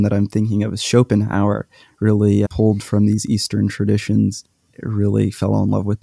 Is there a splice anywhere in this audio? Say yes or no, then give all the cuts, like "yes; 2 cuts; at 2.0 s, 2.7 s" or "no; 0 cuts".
yes; 1 cut; at 2.5 s